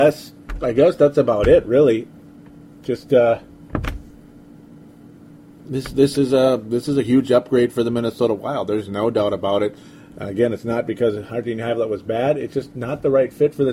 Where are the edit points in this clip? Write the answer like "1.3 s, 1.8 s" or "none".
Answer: none